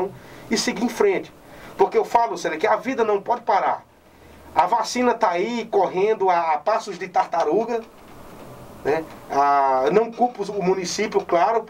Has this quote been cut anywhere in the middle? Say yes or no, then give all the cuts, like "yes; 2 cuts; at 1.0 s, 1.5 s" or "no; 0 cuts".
no; 0 cuts